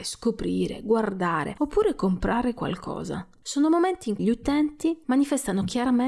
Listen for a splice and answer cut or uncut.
cut